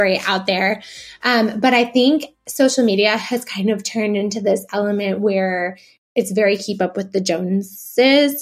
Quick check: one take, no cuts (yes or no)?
yes